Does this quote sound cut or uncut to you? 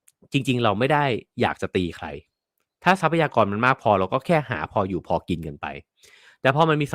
uncut